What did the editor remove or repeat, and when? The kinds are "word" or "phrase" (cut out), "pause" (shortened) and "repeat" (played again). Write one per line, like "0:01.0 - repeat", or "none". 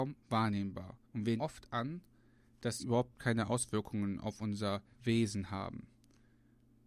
0:01.0 - pause
0:01.4 - word
0:02.8 - word
0:04.9 - pause